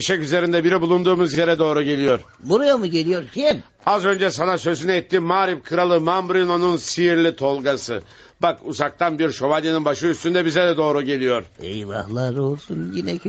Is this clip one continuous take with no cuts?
yes; 0 cuts

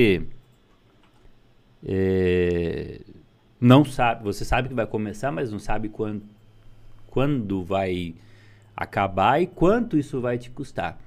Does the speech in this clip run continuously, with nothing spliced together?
yes; 0 cuts

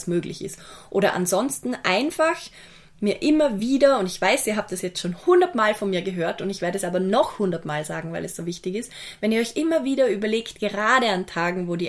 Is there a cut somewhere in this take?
no; 0 cuts

